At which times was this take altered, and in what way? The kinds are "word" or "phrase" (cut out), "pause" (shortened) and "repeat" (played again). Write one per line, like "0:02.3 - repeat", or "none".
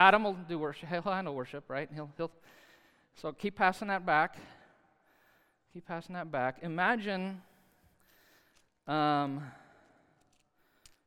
none